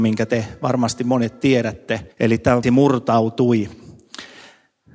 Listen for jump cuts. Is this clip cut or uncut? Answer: cut